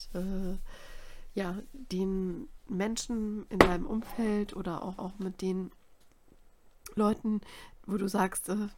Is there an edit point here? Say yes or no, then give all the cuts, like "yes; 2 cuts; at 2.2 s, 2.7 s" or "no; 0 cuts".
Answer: yes; 1 cut; at 5.0 s